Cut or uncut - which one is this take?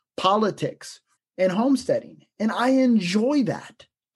cut